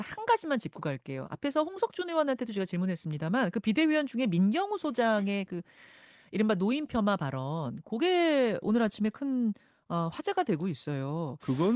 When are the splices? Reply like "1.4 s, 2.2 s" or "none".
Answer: none